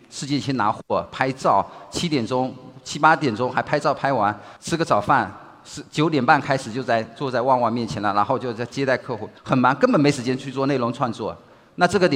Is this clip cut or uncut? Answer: cut